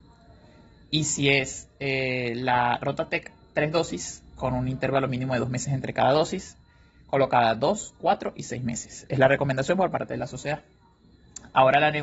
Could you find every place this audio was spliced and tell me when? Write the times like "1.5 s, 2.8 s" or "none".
none

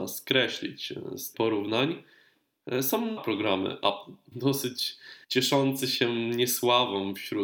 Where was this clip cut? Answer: 1.3 s, 3.2 s, 4.3 s, 5.2 s

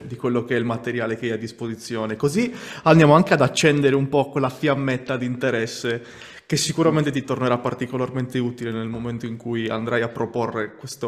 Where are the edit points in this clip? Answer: none

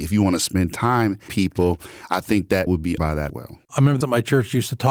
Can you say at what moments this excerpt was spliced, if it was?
1.3 s, 2.7 s, 3.0 s, 3.3 s, 3.6 s, 4.0 s

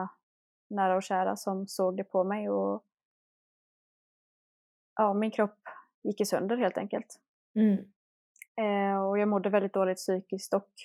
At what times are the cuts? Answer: none

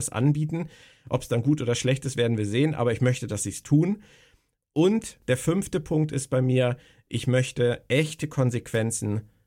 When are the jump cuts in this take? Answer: none

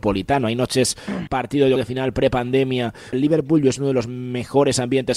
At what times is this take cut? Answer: 1.3 s, 1.8 s, 3.1 s

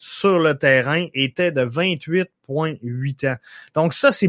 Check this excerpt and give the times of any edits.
none

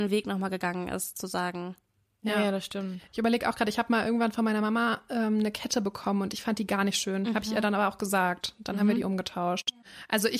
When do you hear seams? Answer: none

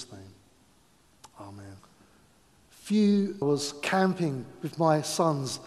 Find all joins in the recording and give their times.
1.8 s, 3.4 s

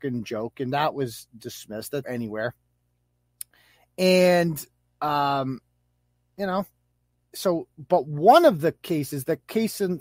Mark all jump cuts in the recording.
2.0 s

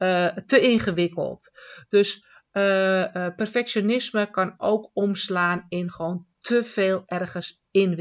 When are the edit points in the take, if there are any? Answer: none

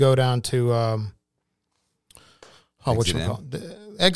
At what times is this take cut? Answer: none

